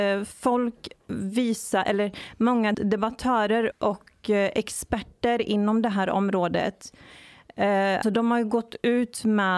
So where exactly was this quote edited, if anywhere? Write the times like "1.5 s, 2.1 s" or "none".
2.7 s, 3.7 s, 8.0 s